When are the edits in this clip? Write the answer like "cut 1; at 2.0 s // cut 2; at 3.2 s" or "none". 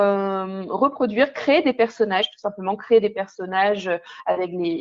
none